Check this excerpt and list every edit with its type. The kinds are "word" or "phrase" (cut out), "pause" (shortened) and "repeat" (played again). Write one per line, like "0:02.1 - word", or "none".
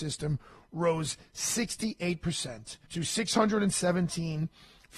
0:02.9 - pause